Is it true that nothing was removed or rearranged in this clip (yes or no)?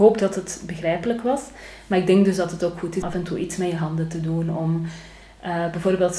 no